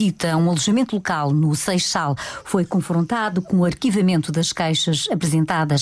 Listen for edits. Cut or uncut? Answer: uncut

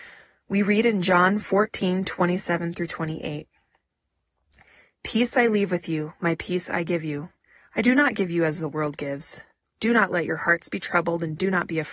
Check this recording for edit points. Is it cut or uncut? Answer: uncut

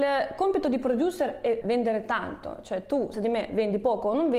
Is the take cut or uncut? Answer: cut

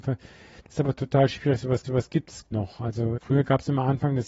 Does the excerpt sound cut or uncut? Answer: cut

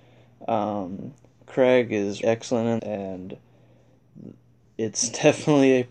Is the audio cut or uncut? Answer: cut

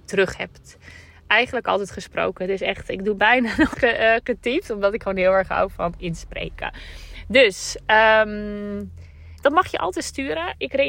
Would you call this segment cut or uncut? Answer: cut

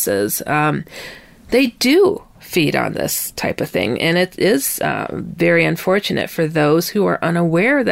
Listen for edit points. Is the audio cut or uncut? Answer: uncut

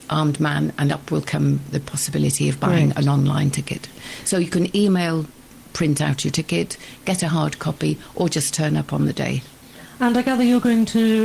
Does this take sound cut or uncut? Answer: uncut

